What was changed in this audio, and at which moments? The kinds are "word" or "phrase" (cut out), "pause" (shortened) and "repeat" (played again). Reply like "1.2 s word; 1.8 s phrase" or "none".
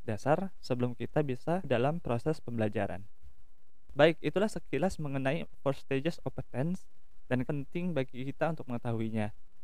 1.6 s phrase; 6.2 s word; 7.5 s word